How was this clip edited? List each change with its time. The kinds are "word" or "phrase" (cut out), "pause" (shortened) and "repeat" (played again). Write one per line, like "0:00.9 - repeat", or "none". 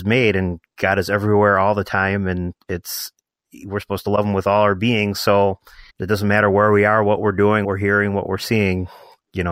0:05.9 - pause
0:07.6 - word

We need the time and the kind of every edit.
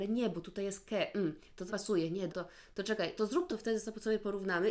0:01.7 - word
0:02.3 - word
0:03.2 - word
0:03.5 - phrase

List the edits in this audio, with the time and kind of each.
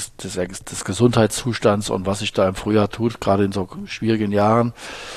none

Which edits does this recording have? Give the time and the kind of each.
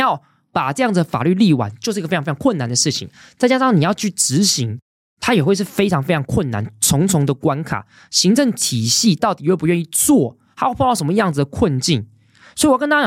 none

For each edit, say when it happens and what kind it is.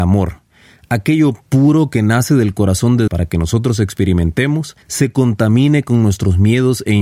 0:03.1 - word
0:04.8 - pause

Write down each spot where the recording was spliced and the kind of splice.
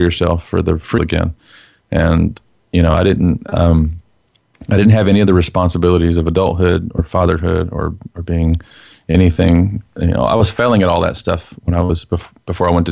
0:01.0 - word

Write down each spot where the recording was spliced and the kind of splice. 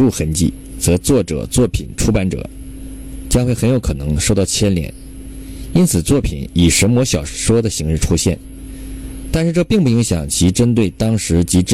none

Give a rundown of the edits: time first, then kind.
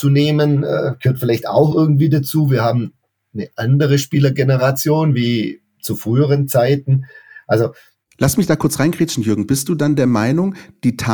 none

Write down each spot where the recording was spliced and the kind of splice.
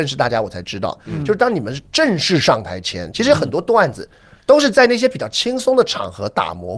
none

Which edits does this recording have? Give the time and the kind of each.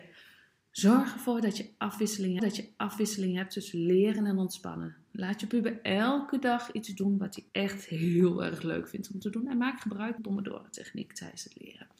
0:02.4 - repeat
0:07.5 - pause
0:10.2 - phrase

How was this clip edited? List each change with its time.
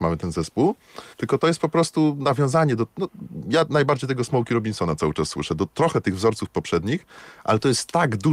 0:01.1 - pause

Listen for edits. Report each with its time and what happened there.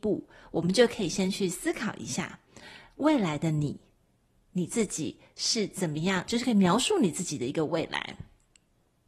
0:06.3 - phrase

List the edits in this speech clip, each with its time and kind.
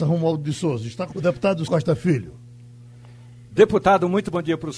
0:01.1 - word
0:01.7 - word

